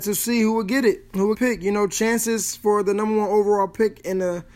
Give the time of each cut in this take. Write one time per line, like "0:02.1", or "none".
0:01.3